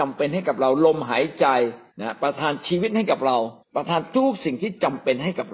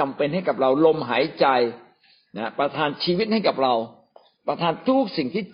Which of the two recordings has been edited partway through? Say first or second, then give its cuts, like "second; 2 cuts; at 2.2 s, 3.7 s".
first; 2 cuts; at 1.9 s, 3.6 s